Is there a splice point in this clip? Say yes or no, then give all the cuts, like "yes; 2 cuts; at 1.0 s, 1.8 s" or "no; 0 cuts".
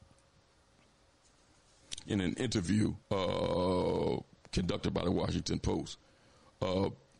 yes; 1 cut; at 3.0 s